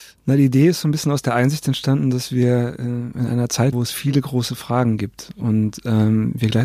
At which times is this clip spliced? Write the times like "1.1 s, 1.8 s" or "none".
3.7 s